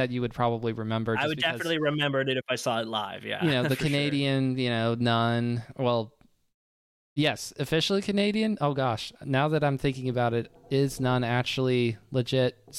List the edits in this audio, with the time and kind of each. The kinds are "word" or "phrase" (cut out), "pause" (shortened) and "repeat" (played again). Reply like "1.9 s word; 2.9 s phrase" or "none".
none